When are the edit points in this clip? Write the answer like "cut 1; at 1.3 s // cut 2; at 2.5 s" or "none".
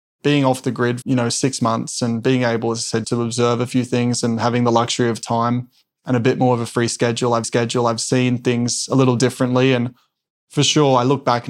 cut 1; at 1.0 s // cut 2; at 3.0 s // cut 3; at 7.4 s